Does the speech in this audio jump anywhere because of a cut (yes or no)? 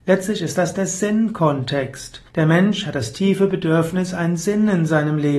yes